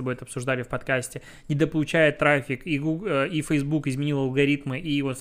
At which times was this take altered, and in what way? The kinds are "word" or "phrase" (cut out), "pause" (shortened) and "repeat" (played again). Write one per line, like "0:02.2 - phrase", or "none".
none